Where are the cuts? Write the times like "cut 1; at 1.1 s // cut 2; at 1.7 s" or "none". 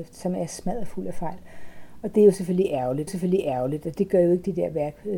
cut 1; at 3.1 s